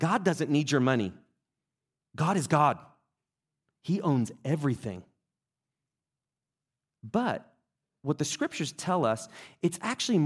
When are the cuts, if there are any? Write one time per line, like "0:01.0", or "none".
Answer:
none